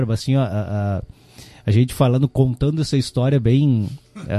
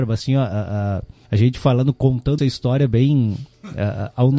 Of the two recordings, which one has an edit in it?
second; 2 cuts; at 1.3 s, 2.4 s

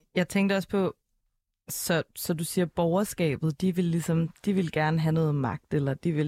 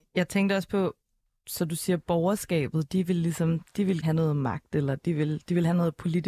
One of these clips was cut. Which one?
second; 2 cuts; at 1.4 s, 4.0 s

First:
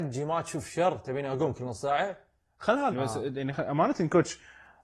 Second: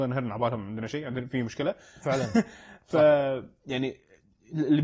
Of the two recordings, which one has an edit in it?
first; 1 cut; at 2.9 s

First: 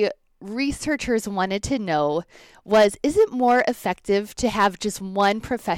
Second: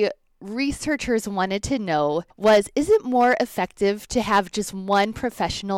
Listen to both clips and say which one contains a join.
second; 1 cut; at 2.3 s

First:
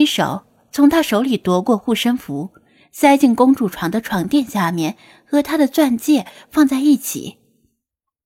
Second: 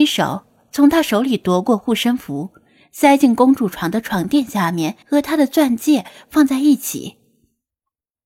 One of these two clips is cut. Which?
second; 1 cut; at 5.0 s

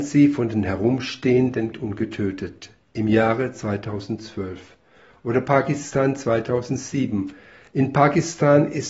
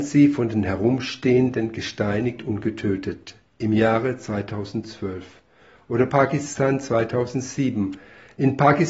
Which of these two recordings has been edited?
first; 1 cut; at 1.7 s

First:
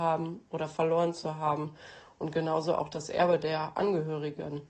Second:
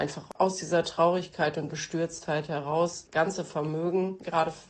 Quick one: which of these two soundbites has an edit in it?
second; 2 cuts; at 1.7 s, 3.1 s

